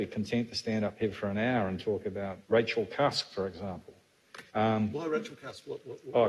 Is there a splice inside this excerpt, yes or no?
yes